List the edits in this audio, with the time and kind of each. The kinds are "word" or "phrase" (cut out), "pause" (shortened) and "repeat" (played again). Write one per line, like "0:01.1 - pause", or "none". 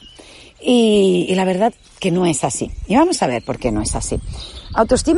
none